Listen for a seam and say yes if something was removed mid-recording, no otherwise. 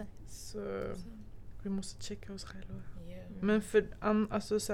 no